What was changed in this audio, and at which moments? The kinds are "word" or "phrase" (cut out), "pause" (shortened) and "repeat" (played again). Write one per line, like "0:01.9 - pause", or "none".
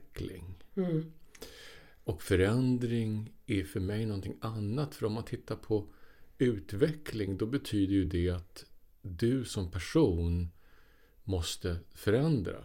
none